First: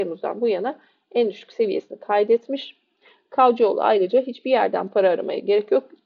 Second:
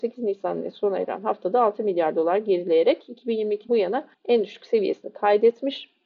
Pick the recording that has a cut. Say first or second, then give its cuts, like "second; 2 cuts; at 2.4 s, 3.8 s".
second; 2 cuts; at 3.7 s, 4.1 s